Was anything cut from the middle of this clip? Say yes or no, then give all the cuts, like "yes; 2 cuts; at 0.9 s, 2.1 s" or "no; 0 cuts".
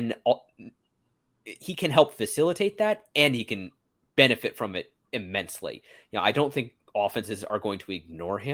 no; 0 cuts